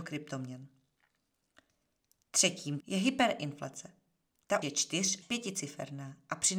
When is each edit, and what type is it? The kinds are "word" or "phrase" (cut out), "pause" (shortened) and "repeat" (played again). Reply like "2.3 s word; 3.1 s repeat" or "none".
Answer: 2.8 s word; 4.6 s word; 5.2 s word